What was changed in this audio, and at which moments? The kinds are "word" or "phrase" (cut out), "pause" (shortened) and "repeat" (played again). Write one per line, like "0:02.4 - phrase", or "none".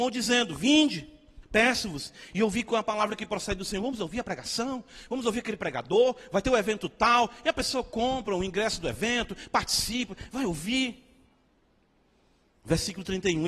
none